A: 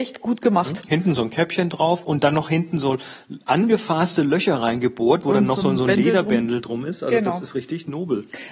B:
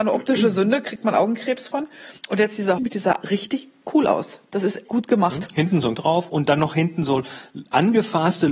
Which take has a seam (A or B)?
B